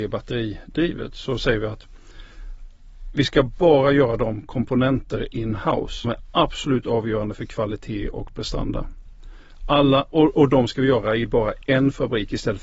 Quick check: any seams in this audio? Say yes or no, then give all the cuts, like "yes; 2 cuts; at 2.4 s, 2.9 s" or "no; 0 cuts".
yes; 1 cut; at 6.0 s